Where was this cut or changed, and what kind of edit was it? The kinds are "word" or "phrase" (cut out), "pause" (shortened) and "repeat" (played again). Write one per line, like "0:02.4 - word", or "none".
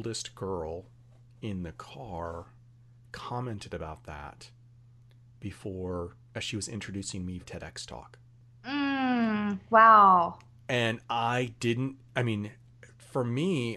0:07.4 - word